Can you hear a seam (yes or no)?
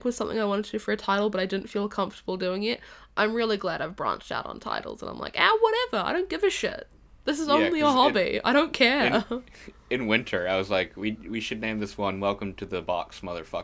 no